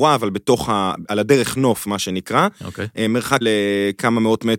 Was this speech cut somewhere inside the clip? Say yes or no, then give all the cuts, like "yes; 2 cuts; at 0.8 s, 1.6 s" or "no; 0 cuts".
yes; 2 cuts; at 1.1 s, 3.4 s